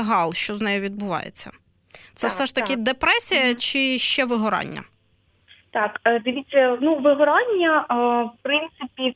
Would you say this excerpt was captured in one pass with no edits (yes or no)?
yes